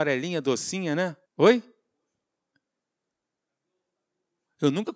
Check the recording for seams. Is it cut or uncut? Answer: cut